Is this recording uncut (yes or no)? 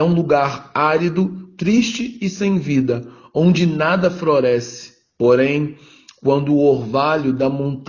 yes